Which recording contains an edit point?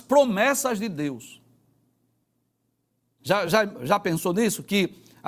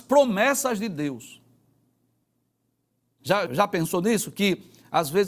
second; 1 cut; at 3.5 s

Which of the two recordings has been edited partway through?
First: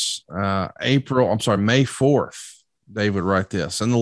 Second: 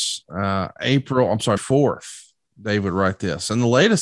second; 1 cut; at 1.6 s

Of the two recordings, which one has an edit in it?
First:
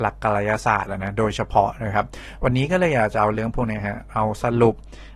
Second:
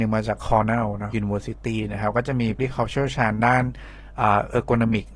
second; 2 cuts; at 1.1 s, 2.6 s

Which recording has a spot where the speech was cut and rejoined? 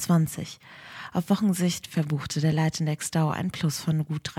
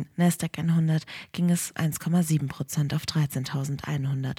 second; 1 cut; at 1.8 s

